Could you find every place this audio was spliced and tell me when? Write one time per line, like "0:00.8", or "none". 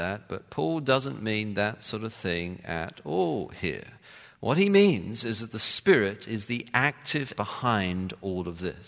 0:07.4